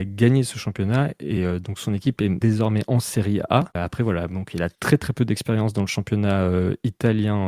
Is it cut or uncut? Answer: uncut